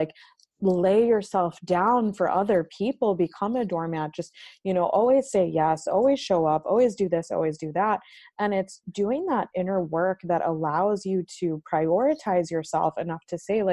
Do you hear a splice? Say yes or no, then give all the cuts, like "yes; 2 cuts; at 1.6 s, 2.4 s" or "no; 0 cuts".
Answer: no; 0 cuts